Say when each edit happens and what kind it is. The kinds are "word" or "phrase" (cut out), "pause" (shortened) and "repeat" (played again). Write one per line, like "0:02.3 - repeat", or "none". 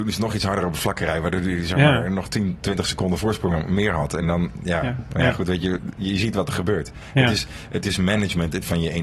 none